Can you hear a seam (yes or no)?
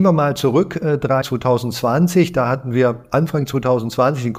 yes